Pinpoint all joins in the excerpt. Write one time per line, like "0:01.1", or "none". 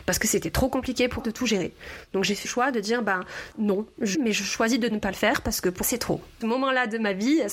0:01.2
0:02.4
0:03.5
0:04.1
0:05.8
0:06.4